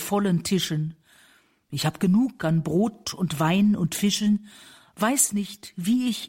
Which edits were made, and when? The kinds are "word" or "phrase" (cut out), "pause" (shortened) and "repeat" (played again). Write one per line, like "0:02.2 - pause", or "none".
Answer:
none